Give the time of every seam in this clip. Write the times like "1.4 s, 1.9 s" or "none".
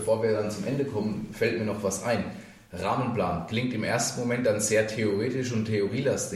none